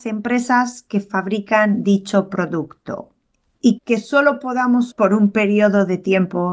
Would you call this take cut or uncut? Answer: cut